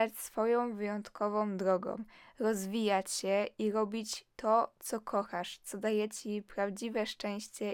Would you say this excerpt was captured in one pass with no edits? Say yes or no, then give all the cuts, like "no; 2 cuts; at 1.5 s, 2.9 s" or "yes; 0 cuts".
yes; 0 cuts